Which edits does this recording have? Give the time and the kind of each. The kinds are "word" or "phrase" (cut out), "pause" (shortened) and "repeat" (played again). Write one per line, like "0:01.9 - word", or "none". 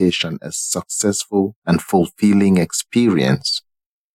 0:01.6 - pause